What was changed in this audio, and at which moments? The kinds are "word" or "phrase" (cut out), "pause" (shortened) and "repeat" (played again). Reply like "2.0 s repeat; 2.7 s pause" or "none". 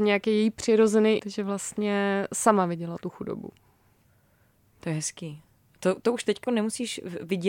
1.2 s word; 6.4 s word